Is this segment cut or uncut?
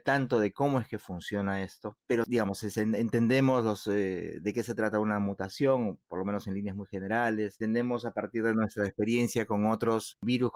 uncut